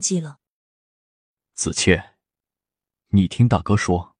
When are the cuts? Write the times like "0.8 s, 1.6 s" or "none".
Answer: none

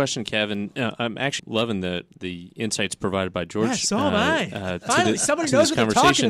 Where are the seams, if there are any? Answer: 1.4 s

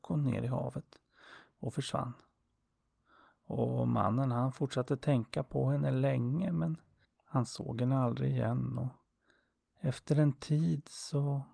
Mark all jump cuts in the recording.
none

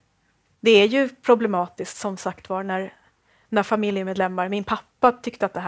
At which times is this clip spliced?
none

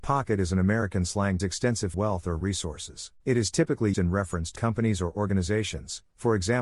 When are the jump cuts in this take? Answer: 1.4 s, 1.9 s, 3.2 s, 3.9 s, 4.6 s

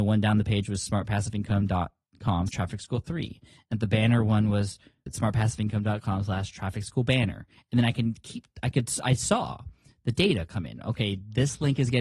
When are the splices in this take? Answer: 2.5 s, 5.1 s

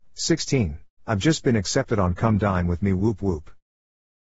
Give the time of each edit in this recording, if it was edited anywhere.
1.0 s

